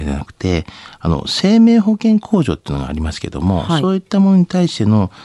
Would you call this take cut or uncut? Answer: uncut